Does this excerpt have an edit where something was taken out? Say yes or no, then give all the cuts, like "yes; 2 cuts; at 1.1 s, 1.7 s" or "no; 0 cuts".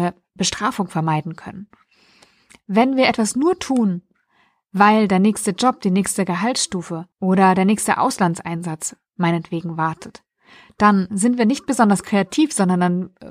yes; 1 cut; at 7.1 s